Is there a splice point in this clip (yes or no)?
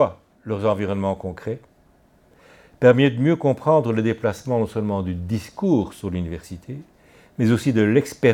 no